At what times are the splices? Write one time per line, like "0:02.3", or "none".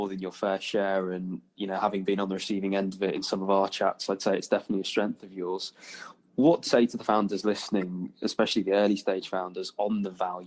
0:06.7